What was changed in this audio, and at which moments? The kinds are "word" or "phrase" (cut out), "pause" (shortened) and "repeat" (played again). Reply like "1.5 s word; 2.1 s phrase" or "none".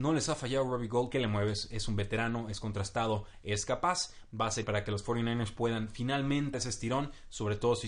1.1 s word; 4.6 s word; 6.5 s word